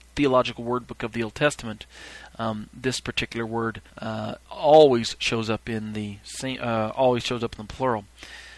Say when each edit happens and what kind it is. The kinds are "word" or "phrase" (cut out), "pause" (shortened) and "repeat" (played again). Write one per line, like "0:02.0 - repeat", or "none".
0:03.9 - pause